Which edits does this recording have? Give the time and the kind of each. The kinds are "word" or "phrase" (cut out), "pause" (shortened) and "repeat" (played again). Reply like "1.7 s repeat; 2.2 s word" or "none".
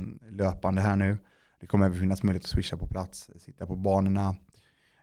none